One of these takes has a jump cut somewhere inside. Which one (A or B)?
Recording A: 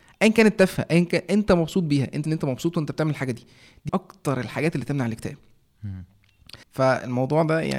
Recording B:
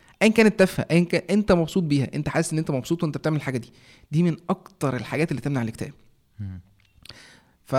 A